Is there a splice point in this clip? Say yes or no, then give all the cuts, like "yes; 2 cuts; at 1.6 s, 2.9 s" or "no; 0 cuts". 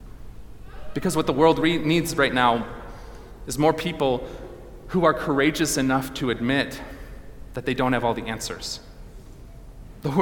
no; 0 cuts